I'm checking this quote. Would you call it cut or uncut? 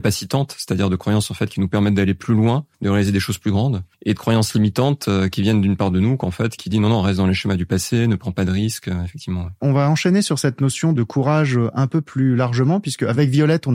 cut